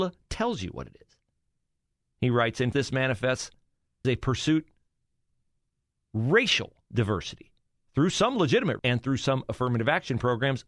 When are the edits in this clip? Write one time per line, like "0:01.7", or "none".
0:02.7
0:04.0
0:08.8